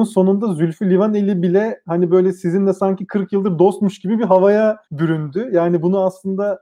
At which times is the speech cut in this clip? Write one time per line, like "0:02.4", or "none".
0:04.9